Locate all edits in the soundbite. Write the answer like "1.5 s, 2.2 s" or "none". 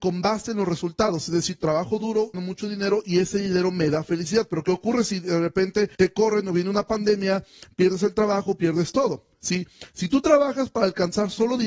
2.3 s, 5.9 s